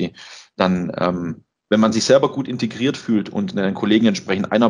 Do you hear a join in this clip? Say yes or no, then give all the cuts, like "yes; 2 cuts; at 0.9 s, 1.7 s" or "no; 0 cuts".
no; 0 cuts